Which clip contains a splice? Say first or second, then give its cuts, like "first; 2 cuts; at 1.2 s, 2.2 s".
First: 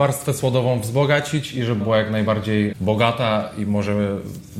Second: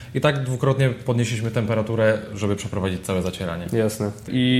first; 1 cut; at 1.8 s